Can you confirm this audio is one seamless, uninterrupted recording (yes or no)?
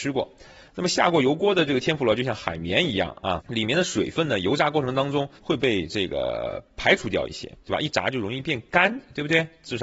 no